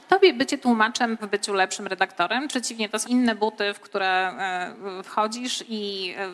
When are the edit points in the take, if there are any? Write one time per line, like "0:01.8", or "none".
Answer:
0:01.2
0:02.5
0:03.1